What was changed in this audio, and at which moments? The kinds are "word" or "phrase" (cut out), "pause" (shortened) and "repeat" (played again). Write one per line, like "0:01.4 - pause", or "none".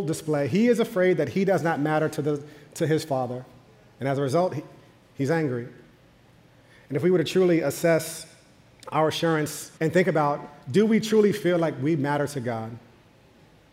0:09.8 - pause